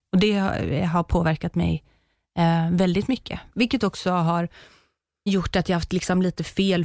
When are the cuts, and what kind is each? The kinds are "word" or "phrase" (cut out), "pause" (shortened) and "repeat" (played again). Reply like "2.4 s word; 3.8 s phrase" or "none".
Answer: 5.3 s word

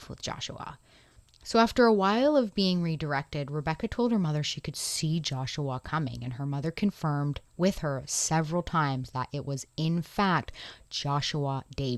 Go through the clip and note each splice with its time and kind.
7.5 s pause

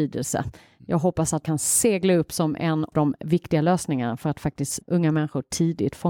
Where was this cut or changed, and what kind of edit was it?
1.4 s word; 2.9 s word; 4.8 s word

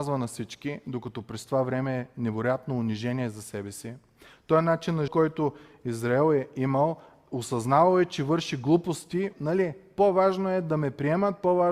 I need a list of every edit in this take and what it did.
5.1 s word; 9.3 s word

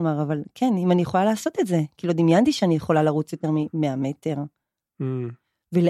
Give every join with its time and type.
none

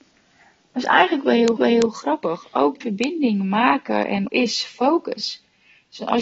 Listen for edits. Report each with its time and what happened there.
1.6 s repeat; 2.8 s word; 4.3 s word

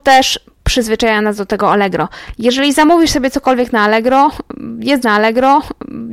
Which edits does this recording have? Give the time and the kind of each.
5.0 s repeat

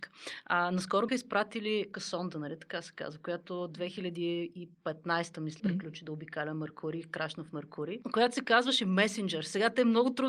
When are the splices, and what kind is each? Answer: 1.1 s word; 1.9 s word; 5.6 s word

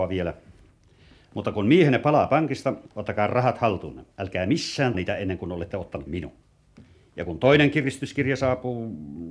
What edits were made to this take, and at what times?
2.9 s pause; 4.1 s pause; 4.9 s phrase; 6.1 s word

